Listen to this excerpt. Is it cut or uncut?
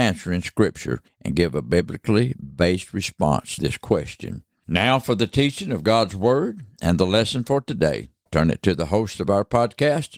cut